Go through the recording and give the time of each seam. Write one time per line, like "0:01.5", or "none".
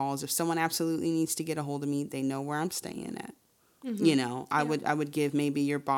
none